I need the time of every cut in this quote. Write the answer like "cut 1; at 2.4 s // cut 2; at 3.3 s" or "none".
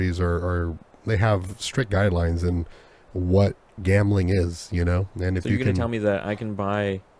none